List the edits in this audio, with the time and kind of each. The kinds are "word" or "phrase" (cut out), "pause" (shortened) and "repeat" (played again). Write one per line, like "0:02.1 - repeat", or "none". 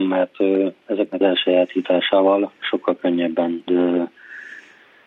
0:01.2 - phrase
0:03.7 - word